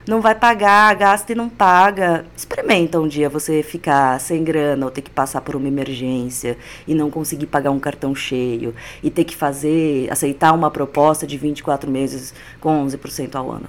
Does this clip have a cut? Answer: no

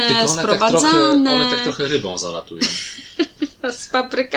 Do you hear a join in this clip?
no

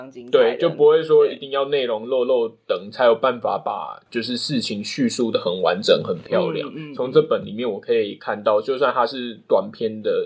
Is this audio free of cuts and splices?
yes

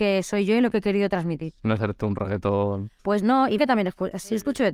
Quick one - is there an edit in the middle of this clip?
yes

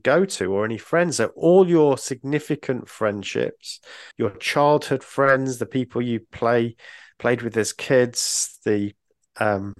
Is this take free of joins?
no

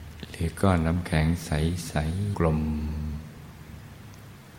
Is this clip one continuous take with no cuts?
no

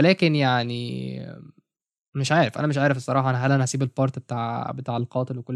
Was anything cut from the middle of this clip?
no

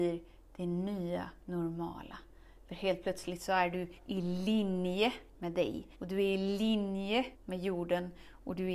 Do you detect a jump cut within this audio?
yes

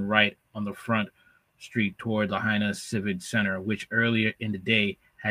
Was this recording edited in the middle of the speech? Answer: no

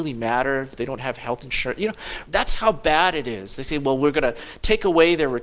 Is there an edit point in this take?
yes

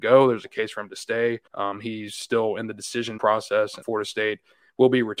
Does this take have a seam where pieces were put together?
yes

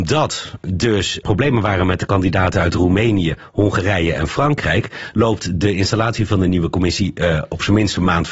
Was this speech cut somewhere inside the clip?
yes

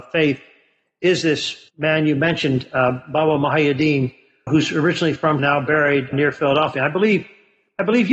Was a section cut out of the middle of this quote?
yes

